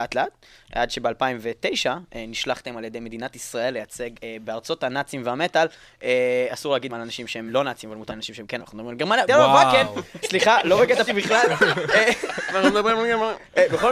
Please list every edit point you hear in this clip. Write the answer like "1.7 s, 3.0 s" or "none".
4.2 s, 6.9 s, 7.5 s, 8.1 s, 8.6 s, 9.3 s, 10.2 s, 11.1 s